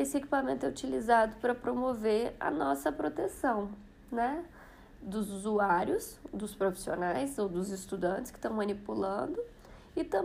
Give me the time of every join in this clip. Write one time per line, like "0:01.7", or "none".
none